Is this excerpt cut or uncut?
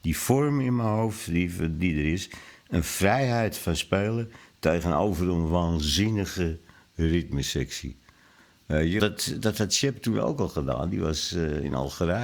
cut